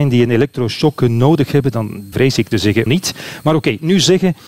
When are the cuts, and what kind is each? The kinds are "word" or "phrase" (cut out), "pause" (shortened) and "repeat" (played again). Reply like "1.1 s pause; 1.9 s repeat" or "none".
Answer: 2.1 s phrase; 2.5 s word; 2.9 s word